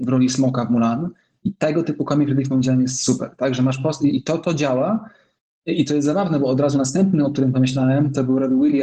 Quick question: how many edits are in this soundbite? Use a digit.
0